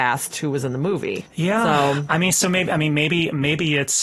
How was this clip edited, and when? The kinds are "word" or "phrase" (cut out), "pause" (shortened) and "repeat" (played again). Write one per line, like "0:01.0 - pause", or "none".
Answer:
0:01.3 - pause